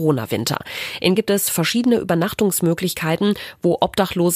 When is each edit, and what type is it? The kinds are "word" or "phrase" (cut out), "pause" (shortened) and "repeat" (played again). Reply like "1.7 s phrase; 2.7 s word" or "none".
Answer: 1.2 s word